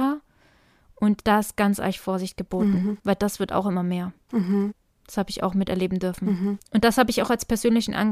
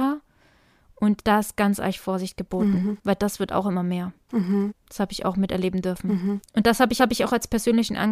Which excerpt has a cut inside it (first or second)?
second